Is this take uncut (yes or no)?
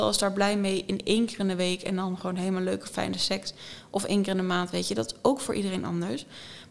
yes